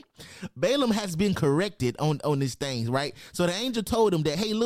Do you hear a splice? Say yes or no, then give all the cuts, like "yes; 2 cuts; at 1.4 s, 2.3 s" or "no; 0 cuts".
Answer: no; 0 cuts